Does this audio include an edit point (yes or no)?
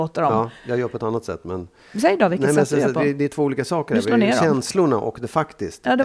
no